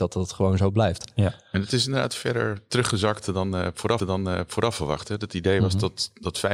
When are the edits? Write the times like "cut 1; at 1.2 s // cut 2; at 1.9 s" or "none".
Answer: cut 1; at 4.0 s